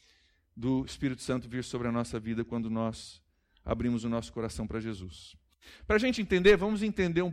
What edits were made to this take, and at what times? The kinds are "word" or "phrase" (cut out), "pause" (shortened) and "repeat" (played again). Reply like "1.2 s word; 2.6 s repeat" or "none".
none